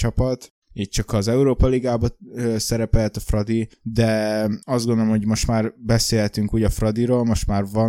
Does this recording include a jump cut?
yes; 1 cut; at 4.6 s

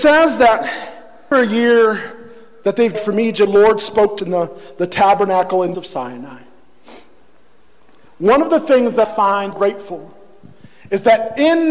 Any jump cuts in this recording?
yes; 7 cuts; at 1.3 s, 2.9 s, 3.5 s, 4.2 s, 5.7 s, 9.0 s, 9.5 s

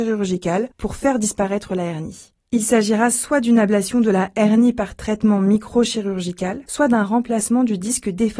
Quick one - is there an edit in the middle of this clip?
no; 0 cuts

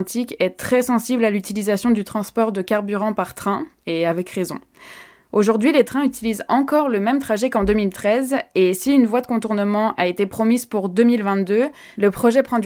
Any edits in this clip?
no; 0 cuts

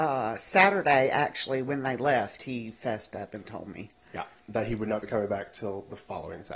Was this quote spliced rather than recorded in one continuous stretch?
no; 0 cuts

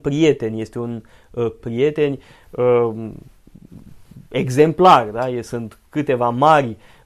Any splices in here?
yes; 1 cut; at 1.6 s

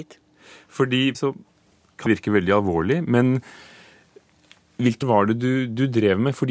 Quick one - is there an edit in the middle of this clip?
yes; 3 cuts; at 1.1 s, 2.1 s, 5.0 s

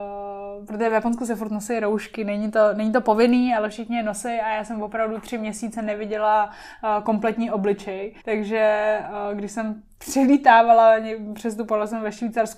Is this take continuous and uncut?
no; 1 cut; at 8.2 s

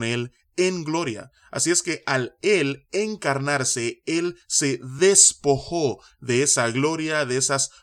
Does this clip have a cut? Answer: no; 0 cuts

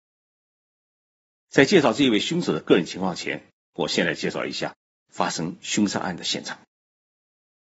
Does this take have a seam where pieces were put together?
no; 0 cuts

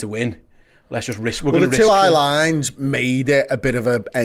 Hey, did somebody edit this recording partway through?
no; 0 cuts

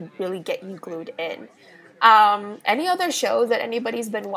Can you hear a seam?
no; 0 cuts

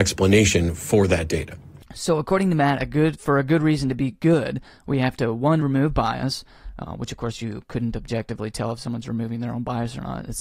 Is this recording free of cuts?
yes; 0 cuts

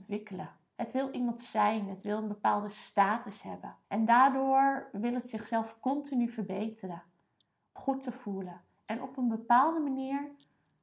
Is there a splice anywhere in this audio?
yes; 2 cuts; at 3.8 s, 7.8 s

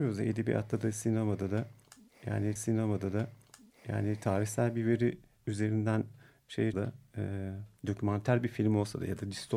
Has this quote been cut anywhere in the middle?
yes; 3 cuts; at 2.6 s, 6.7 s, 7.8 s

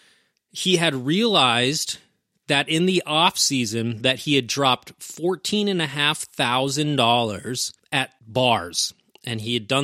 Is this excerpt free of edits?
yes; 0 cuts

